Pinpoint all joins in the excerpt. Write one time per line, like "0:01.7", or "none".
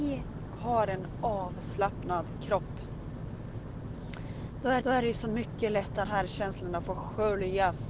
0:04.8
0:06.0